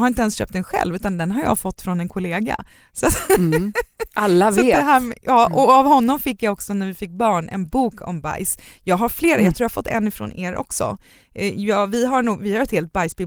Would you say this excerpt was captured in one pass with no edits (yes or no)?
yes